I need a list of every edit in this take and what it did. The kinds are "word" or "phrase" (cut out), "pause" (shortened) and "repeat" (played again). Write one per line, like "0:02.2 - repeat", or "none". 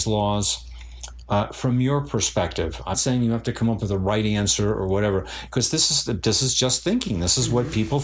0:02.9 - word